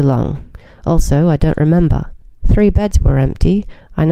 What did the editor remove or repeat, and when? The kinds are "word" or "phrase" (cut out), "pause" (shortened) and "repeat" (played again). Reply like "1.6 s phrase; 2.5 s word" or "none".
2.2 s pause